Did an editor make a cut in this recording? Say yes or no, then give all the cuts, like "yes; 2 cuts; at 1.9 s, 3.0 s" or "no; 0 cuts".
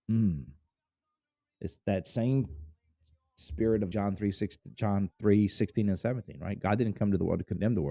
yes; 1 cut; at 3.9 s